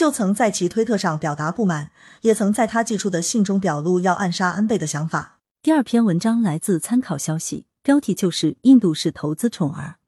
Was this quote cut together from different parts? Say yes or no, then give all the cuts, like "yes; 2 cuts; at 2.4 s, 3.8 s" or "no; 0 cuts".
no; 0 cuts